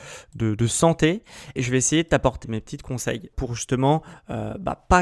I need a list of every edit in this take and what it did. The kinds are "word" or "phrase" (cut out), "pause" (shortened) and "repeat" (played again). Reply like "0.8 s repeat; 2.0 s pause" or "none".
1.6 s word; 2.4 s word; 3.3 s word